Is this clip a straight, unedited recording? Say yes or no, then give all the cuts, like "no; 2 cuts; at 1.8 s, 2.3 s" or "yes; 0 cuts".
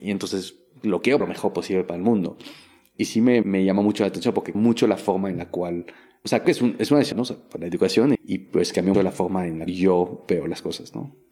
no; 8 cuts; at 1.2 s, 3.4 s, 4.5 s, 6.4 s, 7.1 s, 8.1 s, 8.9 s, 9.7 s